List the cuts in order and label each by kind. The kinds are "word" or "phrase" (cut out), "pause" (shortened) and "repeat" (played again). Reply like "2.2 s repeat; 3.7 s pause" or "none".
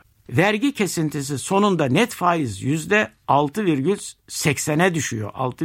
none

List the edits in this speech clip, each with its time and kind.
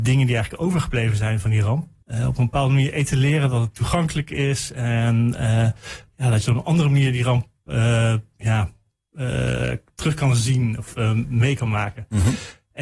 2.0 s pause

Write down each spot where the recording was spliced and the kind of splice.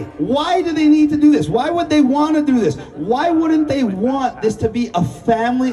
none

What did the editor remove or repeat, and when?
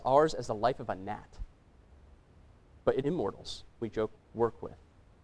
3.0 s word; 3.8 s word; 4.2 s word

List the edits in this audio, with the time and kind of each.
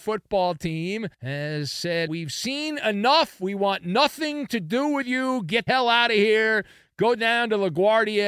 1.1 s pause; 2.1 s word; 5.7 s word

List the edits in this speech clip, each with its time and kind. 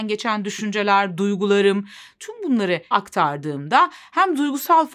2.9 s word

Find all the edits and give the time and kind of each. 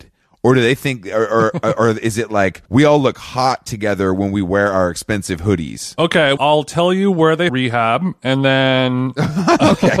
2.7 s pause; 6.4 s word; 7.5 s phrase

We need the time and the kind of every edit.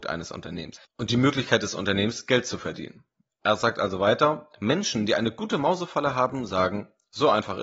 none

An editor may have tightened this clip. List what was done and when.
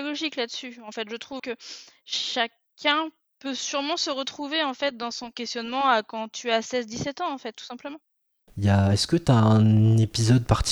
1.4 s word

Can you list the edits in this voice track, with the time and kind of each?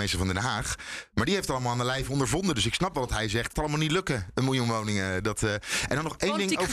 3.5 s phrase

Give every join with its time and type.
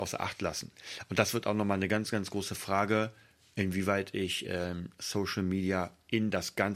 none

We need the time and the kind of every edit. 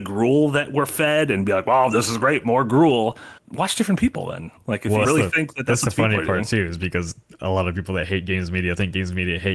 3.4 s word; 5.0 s phrase

